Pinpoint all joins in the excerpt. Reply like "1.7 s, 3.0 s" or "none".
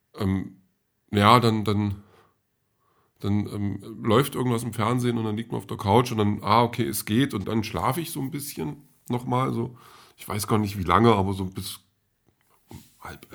7.4 s